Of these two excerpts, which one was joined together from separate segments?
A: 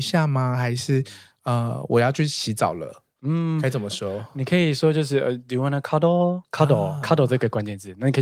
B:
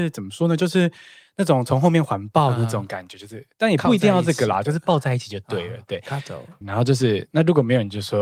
B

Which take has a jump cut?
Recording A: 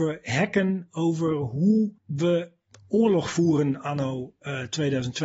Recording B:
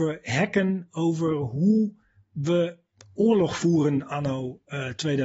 A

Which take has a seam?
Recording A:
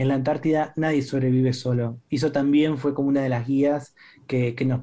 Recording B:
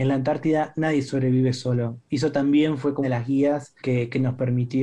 B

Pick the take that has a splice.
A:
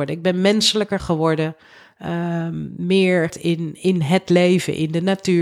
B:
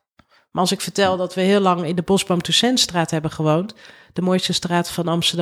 A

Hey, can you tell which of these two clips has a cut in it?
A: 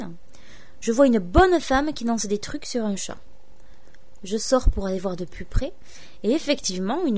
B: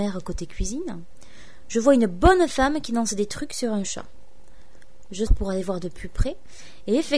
B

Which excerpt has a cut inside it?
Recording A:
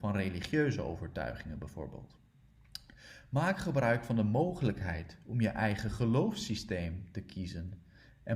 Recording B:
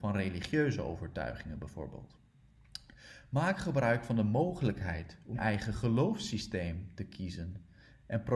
B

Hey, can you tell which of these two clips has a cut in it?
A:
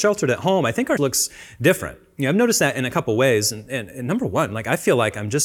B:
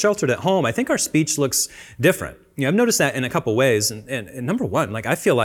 A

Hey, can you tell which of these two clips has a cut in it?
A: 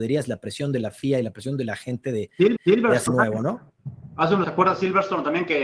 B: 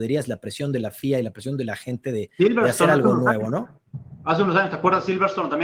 A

